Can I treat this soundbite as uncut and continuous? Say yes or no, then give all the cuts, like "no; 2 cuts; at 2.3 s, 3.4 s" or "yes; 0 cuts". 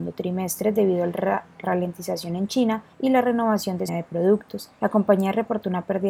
no; 4 cuts; at 1.6 s, 2.9 s, 3.9 s, 4.7 s